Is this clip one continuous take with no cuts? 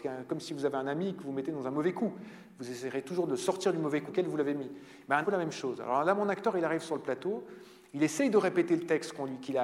no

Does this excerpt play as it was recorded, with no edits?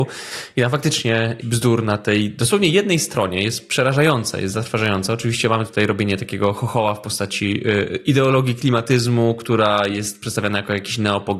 no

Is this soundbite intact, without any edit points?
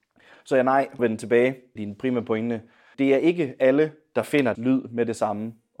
no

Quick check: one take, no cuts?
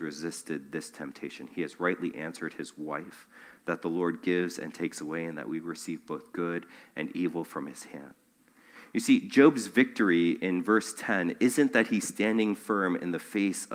yes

